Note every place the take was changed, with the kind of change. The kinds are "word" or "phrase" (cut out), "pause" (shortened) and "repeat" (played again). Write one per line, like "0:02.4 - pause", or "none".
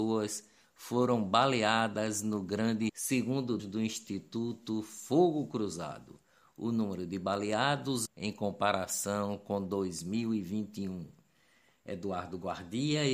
0:02.9 - word
0:03.6 - word
0:08.1 - word